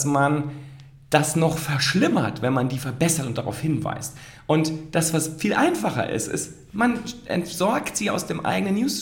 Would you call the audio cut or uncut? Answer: uncut